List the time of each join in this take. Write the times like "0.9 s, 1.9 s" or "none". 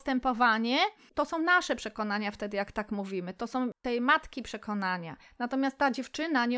none